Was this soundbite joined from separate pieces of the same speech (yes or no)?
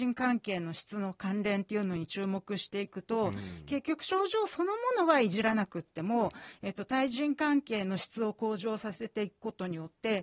no